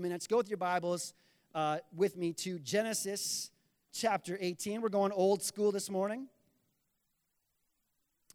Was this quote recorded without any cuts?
no; 1 cut; at 3.9 s

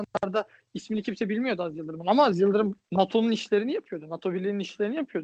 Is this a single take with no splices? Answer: no; 1 cut; at 2.8 s

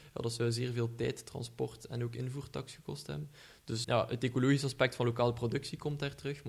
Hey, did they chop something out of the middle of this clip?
yes; 1 cut; at 3.8 s

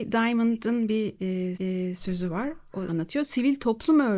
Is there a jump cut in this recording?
yes; 2 cuts; at 1.6 s, 2.9 s

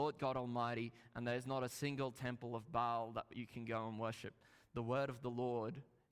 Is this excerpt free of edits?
yes; 0 cuts

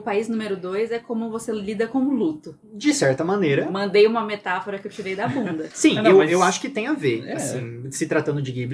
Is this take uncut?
yes; 0 cuts

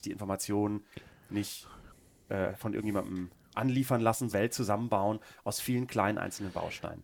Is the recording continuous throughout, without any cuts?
no; 2 cuts; at 2.5 s, 4.3 s

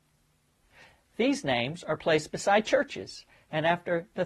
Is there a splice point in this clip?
no; 0 cuts

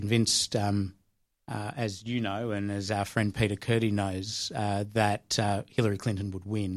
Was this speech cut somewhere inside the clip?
no; 0 cuts

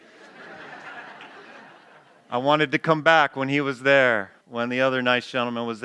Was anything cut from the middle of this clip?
yes; 1 cut; at 4.4 s

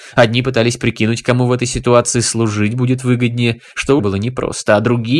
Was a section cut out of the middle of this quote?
yes; 1 cut; at 4.0 s

